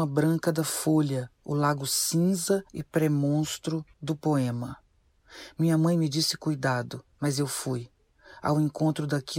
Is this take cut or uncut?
cut